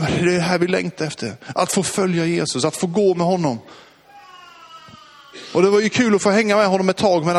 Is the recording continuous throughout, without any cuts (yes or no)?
yes